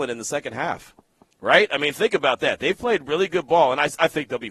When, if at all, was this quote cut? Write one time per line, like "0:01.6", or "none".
none